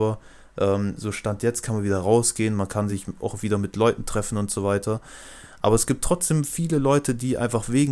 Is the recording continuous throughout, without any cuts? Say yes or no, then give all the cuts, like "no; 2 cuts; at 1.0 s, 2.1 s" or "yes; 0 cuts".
yes; 0 cuts